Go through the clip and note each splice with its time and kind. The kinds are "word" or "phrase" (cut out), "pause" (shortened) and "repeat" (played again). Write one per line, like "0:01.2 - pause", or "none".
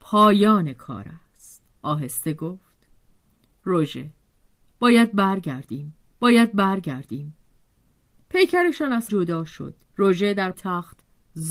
0:01.7 - pause
0:06.2 - repeat
0:09.1 - word
0:09.8 - pause
0:10.5 - word